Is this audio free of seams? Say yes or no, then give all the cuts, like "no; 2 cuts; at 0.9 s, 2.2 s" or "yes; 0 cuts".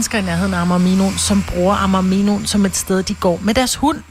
yes; 0 cuts